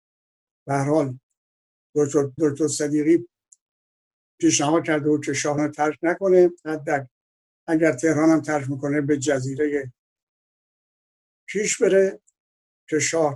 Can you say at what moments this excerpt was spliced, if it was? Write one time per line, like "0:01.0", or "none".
0:02.4
0:05.6